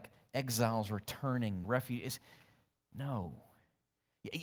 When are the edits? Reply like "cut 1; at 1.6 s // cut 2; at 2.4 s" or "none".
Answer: cut 1; at 1.6 s